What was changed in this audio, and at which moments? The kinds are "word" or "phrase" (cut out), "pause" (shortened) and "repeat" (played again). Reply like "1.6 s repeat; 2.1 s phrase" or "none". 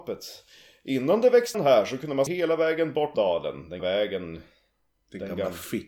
1.5 s word; 2.3 s word; 3.1 s phrase; 3.8 s word